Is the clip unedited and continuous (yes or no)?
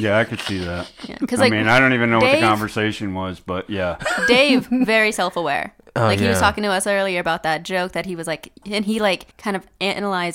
no